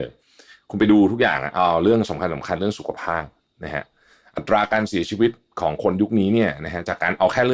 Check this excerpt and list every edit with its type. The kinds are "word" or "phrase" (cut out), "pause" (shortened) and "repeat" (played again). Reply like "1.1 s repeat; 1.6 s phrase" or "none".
none